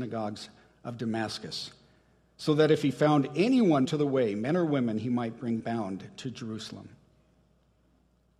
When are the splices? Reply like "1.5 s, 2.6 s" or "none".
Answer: 3.8 s, 5.6 s